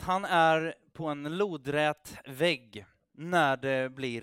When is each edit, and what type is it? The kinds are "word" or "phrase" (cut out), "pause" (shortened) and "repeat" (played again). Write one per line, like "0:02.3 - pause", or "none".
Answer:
none